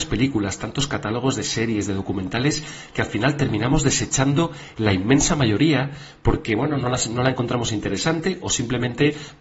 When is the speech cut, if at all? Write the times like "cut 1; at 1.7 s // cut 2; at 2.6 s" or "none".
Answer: none